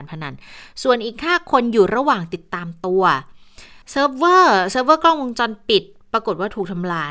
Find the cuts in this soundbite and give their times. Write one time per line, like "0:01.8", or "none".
0:03.8